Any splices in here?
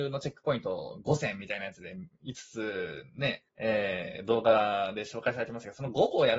yes; 1 cut; at 3.5 s

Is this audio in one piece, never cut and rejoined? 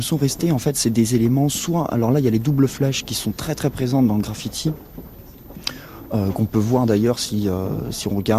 yes; 0 cuts

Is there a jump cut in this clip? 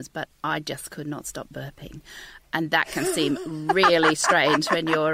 no; 0 cuts

